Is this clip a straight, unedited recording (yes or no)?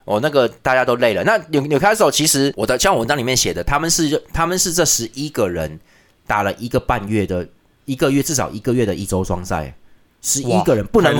yes